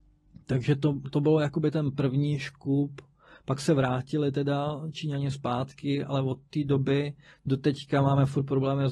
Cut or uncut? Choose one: uncut